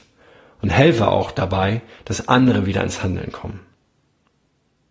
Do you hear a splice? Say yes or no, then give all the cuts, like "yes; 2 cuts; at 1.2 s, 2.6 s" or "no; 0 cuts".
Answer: no; 0 cuts